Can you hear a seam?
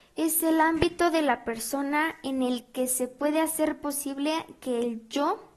no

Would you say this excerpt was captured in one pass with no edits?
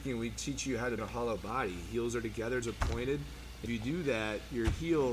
no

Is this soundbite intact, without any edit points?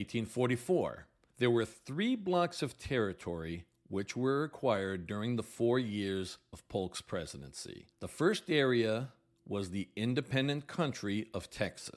yes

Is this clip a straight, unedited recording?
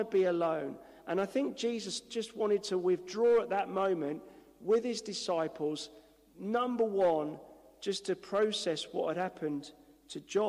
yes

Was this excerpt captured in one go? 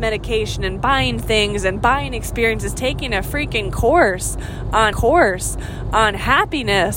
no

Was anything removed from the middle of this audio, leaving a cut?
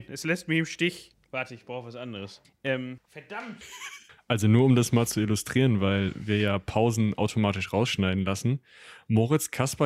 yes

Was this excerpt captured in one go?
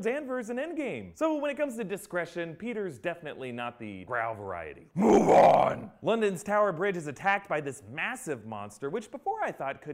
no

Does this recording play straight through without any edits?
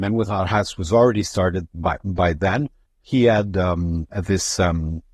yes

